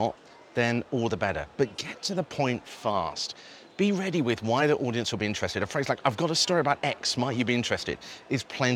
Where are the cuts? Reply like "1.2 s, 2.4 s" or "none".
none